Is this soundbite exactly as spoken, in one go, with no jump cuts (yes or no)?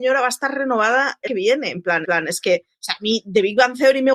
no